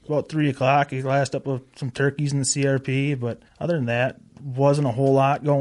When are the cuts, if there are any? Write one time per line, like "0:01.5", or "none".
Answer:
0:03.5